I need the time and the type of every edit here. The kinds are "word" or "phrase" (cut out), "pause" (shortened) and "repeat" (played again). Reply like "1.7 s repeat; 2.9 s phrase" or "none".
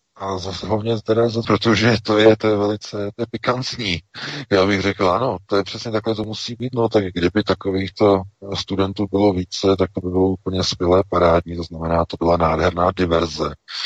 1.4 s word; 12.2 s word